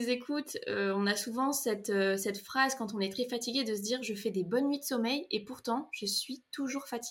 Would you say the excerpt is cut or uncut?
uncut